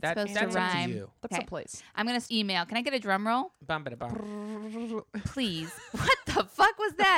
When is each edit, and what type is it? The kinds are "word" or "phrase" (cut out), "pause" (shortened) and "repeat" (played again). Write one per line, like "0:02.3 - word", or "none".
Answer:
0:01.3 - word
0:02.3 - phrase
0:04.0 - word